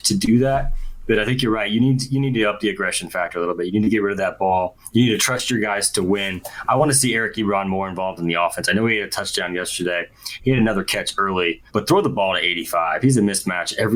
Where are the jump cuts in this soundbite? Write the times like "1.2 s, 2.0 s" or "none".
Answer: 11.7 s